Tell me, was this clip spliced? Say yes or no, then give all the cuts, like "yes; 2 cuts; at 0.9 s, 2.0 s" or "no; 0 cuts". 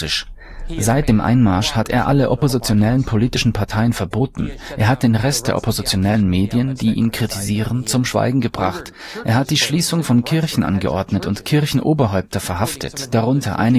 no; 0 cuts